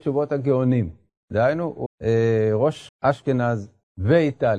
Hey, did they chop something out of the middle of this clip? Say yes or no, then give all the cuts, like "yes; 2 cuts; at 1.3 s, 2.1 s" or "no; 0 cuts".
yes; 2 cuts; at 1.9 s, 2.9 s